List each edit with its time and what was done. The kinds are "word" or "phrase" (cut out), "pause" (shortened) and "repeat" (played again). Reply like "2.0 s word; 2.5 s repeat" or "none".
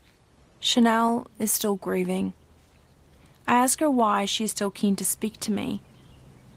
none